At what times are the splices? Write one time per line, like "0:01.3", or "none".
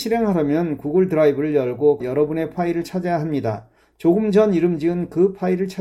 0:02.0

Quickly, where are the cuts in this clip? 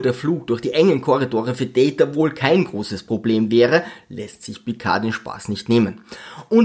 none

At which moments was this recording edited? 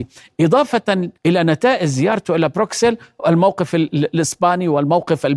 0:01.2

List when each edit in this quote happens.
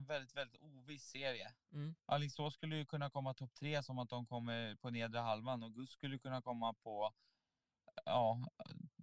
0:02.0

